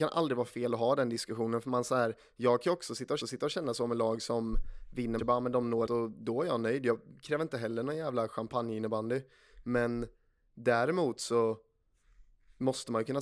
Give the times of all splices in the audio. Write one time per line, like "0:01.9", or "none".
0:03.2
0:05.2
0:05.9